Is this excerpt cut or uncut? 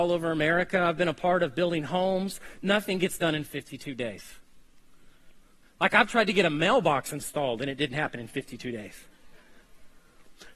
uncut